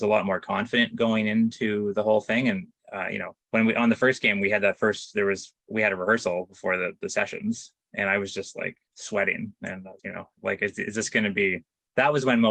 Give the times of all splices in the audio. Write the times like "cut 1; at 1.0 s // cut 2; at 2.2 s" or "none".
cut 1; at 3.4 s // cut 2; at 5.6 s // cut 3; at 8.9 s // cut 4; at 10.0 s